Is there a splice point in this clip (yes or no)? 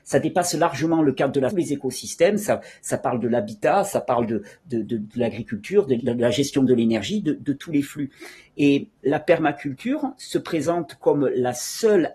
yes